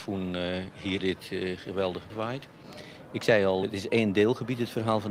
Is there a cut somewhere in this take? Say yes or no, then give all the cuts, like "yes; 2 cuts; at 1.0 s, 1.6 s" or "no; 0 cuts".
yes; 3 cuts; at 1.0 s, 2.1 s, 3.6 s